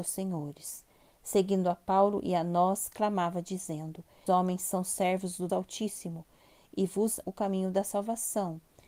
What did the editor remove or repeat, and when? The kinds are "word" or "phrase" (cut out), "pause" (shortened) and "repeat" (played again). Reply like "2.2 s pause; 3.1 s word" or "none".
4.3 s word; 5.5 s word; 7.2 s word